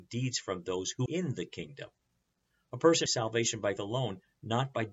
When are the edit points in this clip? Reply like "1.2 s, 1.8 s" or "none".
1.1 s, 3.1 s, 3.8 s